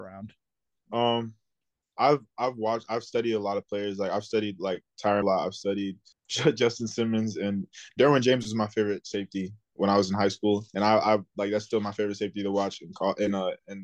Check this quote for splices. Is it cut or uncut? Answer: cut